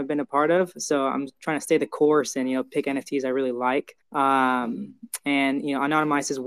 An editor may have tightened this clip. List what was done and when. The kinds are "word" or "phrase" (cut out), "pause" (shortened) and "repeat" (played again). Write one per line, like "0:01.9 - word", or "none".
0:04.0 - pause